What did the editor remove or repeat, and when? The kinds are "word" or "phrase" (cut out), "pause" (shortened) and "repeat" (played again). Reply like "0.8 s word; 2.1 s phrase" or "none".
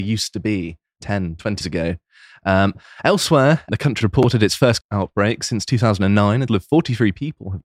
1.0 s word; 1.6 s word; 3.7 s word; 4.0 s word; 4.8 s word; 6.5 s word